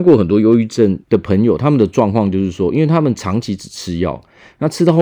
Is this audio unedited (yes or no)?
no